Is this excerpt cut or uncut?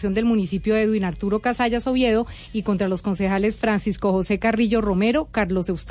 uncut